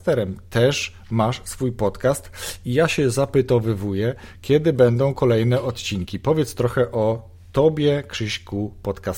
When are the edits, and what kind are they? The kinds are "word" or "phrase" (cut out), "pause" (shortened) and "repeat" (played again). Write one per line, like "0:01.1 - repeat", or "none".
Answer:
none